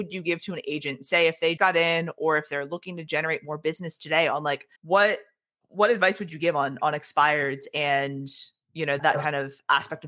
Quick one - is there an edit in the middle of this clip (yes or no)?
yes